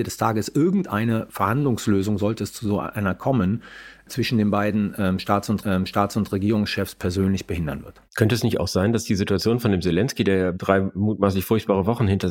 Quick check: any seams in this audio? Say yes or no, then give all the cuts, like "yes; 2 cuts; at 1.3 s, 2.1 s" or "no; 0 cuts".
yes; 1 cut; at 5.6 s